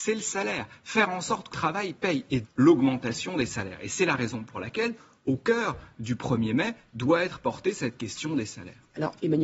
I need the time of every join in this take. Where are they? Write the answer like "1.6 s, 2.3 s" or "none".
1.5 s, 2.4 s